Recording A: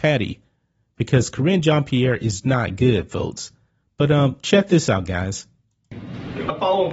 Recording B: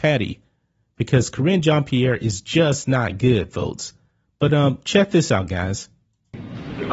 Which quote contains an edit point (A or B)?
A